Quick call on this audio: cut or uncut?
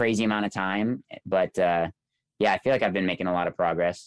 uncut